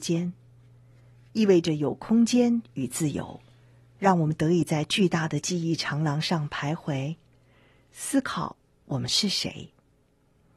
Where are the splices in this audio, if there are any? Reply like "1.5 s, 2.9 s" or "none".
none